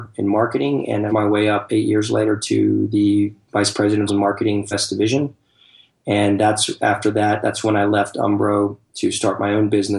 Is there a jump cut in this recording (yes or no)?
yes